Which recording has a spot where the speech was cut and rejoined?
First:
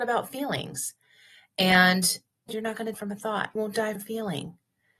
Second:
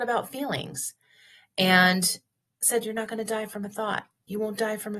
first; 4 cuts; at 2.5 s, 2.9 s, 3.6 s, 4.0 s

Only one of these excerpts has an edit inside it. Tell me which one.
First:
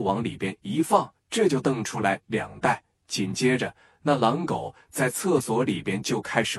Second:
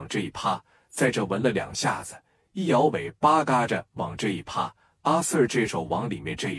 first; 1 cut; at 1.2 s

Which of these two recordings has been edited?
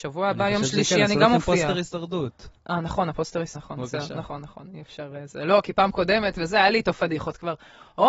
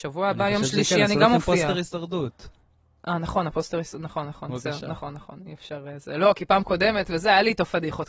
first; 2 cuts; at 2.6 s, 3.6 s

